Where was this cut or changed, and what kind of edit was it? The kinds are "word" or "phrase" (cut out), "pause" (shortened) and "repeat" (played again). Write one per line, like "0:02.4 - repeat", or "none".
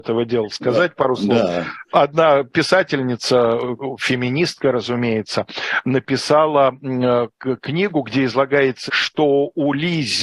0:08.9 - word